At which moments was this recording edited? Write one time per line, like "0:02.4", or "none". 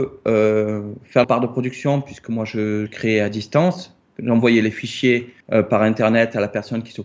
0:01.2
0:02.9
0:05.4